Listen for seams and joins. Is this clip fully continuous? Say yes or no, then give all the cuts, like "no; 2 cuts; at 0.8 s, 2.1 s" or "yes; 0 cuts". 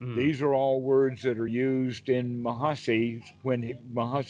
yes; 0 cuts